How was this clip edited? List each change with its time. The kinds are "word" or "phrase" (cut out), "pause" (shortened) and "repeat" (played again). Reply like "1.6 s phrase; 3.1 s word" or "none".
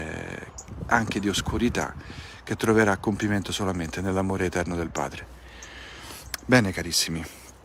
none